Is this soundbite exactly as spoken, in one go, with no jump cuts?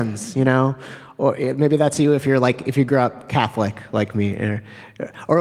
yes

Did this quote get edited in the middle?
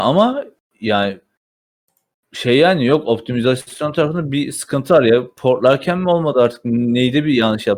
no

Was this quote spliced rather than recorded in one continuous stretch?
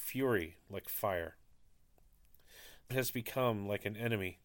yes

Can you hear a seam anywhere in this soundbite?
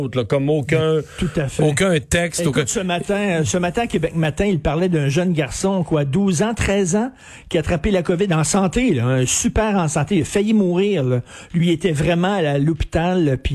no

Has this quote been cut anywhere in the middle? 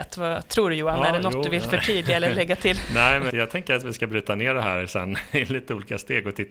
yes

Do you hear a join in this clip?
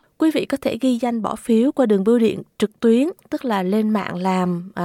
no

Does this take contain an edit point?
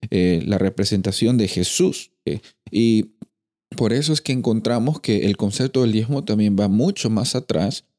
no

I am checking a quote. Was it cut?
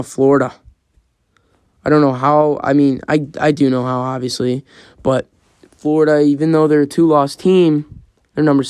no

